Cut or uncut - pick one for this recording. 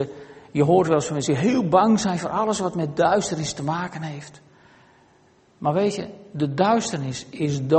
uncut